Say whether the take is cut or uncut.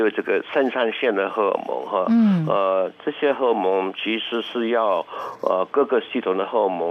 uncut